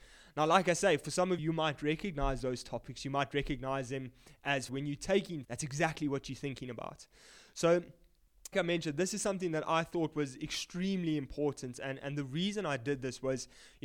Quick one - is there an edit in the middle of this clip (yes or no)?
yes